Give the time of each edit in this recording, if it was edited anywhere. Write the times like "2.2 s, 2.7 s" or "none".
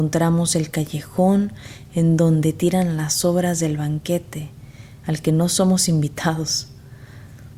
none